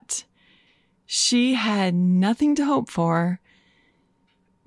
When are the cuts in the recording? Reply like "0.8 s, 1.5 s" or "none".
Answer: none